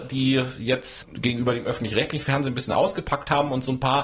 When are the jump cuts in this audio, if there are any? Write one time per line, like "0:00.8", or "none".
0:01.0